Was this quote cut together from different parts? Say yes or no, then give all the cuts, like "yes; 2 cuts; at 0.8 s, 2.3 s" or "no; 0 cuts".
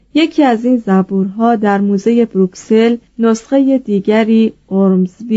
yes; 1 cut; at 3.1 s